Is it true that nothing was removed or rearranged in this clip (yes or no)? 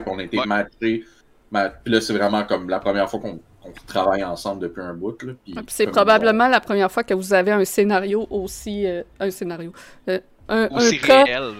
yes